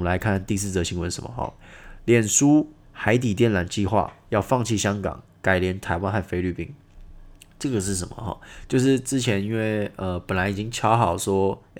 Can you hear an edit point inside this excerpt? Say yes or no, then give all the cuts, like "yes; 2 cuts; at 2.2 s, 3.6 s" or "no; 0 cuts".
yes; 2 cuts; at 2.8 s, 7.3 s